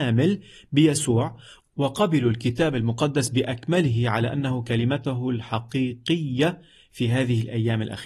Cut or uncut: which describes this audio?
uncut